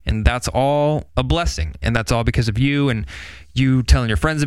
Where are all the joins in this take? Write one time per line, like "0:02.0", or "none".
0:01.1